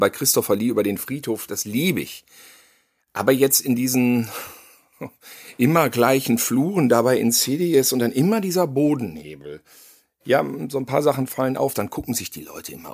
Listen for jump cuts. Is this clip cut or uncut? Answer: uncut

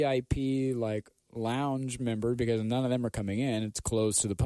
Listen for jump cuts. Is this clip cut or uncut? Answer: uncut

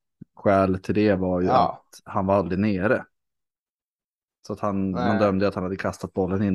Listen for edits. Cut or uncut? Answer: uncut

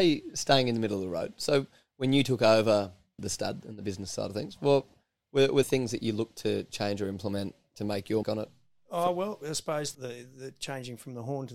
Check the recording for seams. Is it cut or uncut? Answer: cut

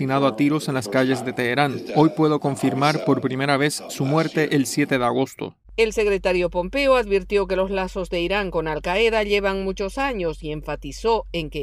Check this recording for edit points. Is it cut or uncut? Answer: cut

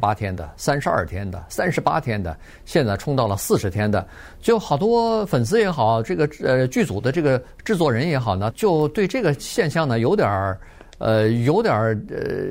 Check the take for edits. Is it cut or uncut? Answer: cut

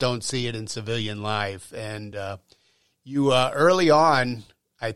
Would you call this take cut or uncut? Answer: uncut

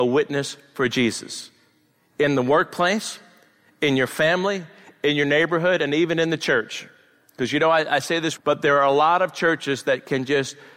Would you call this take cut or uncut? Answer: cut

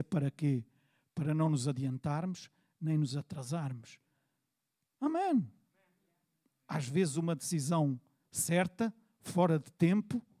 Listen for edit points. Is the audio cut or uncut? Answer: uncut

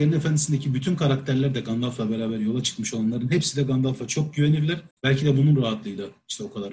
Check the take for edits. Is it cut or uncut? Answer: cut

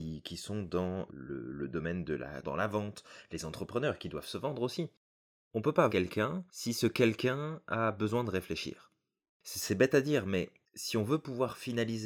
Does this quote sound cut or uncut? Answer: cut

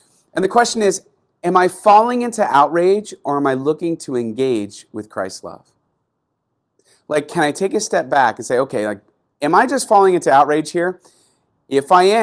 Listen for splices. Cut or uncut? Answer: uncut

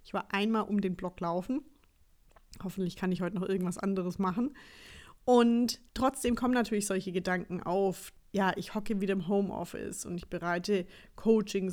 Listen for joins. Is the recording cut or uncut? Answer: cut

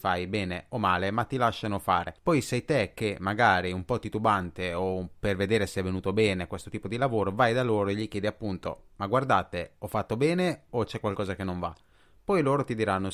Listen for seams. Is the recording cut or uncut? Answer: uncut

